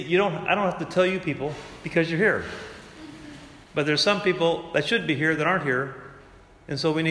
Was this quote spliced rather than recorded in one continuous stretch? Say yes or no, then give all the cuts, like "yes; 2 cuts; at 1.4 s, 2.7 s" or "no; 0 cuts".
yes; 1 cut; at 3.6 s